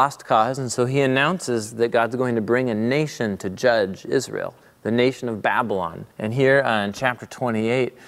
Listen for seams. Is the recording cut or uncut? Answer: cut